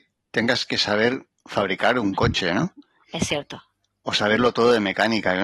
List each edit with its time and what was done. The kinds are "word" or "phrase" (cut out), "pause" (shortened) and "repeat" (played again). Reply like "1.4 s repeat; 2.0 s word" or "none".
none

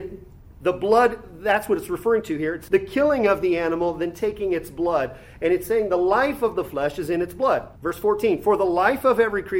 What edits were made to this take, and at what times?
2.7 s word; 7.8 s pause

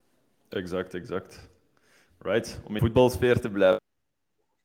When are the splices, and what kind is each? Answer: 2.8 s word

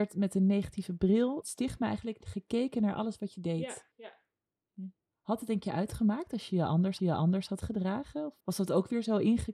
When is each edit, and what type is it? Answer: 1.4 s phrase; 3.9 s pause; 7.0 s repeat; 8.4 s pause

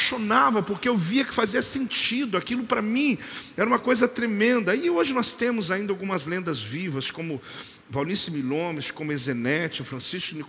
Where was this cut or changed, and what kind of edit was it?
7.8 s pause

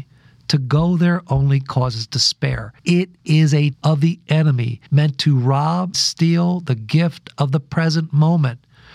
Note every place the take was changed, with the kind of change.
2.8 s pause; 3.7 s word; 4.9 s pause; 5.9 s word

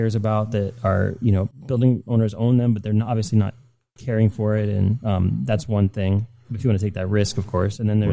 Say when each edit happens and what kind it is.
none

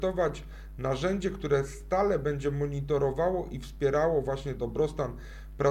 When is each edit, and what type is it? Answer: 4.6 s word

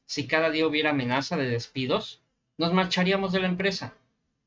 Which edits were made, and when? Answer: none

